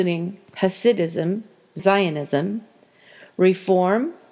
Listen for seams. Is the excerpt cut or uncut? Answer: cut